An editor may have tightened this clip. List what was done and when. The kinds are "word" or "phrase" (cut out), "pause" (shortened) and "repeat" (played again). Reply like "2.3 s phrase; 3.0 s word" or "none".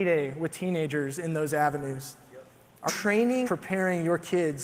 2.9 s word; 3.4 s word